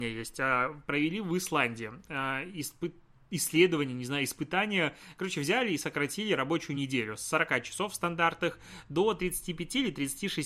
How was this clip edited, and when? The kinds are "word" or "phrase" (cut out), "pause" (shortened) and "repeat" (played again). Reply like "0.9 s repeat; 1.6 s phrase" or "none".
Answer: none

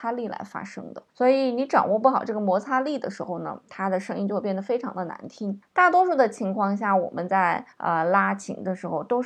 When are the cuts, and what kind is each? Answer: 1.1 s pause; 7.7 s pause

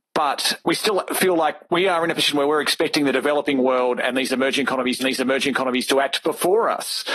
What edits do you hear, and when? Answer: 5.0 s repeat

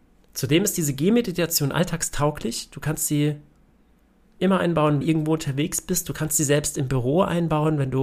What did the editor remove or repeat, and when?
5.0 s phrase

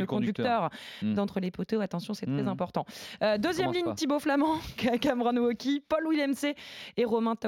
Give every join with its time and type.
none

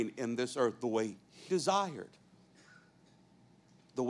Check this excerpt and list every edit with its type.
1.5 s word

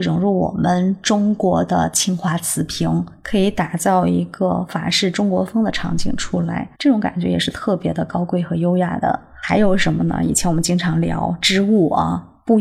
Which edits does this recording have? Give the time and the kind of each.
6.7 s pause

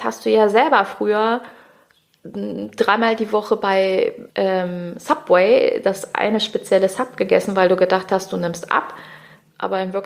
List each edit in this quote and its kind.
4.3 s pause

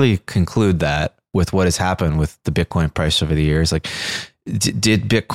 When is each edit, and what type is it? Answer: none

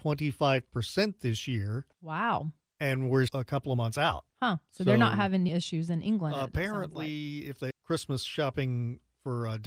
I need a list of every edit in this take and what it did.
1.9 s pause; 3.3 s word; 4.3 s pause; 5.5 s word; 7.7 s word

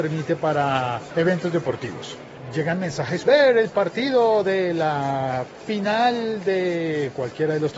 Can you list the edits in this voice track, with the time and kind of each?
3.3 s phrase

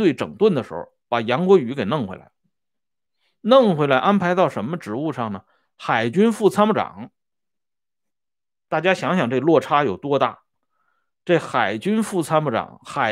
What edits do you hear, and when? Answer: none

